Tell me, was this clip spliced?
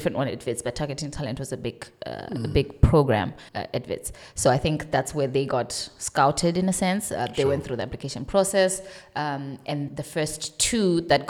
yes; 2 cuts; at 3.5 s, 9.9 s

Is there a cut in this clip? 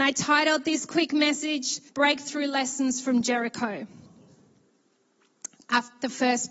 yes; 1 cut; at 1.9 s

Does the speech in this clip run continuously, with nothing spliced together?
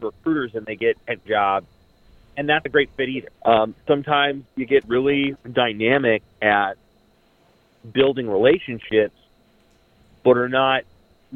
no; 5 cuts; at 1.3 s, 2.7 s, 3.3 s, 4.8 s, 5.4 s

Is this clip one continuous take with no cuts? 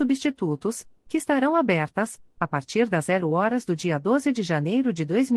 yes; 0 cuts

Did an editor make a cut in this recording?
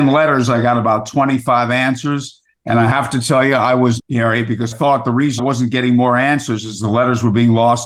yes; 3 cuts; at 4.0 s, 4.7 s, 5.4 s

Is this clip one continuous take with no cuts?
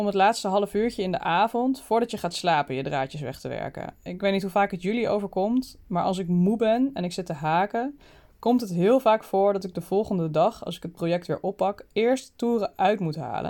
yes; 0 cuts

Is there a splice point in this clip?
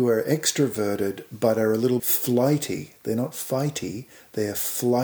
yes; 1 cut; at 2.0 s

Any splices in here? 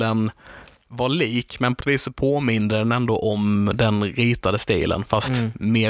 yes; 1 cut; at 1.8 s

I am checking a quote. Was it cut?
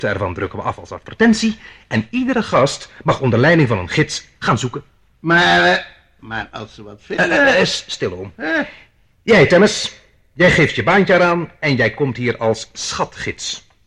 no; 0 cuts

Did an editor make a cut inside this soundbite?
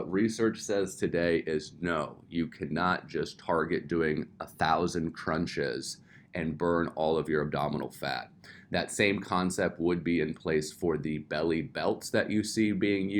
no; 0 cuts

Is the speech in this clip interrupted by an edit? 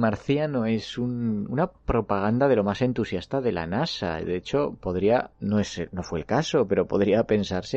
no; 0 cuts

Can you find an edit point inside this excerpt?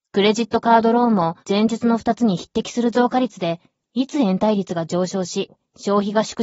yes; 1 cut; at 1.4 s

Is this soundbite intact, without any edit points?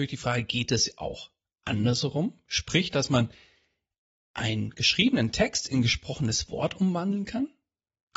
yes; 0 cuts

